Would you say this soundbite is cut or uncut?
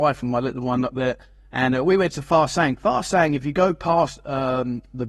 uncut